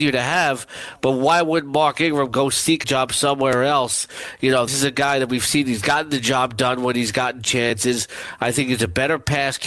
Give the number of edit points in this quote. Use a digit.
2